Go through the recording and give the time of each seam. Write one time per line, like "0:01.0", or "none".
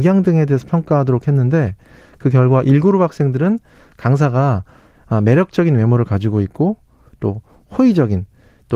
none